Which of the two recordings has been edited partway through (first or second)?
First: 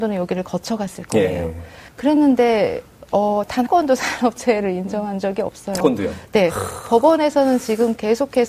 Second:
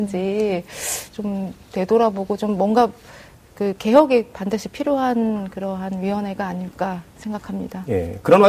first